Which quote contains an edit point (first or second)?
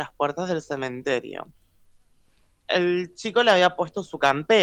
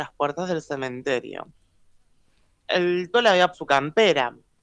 second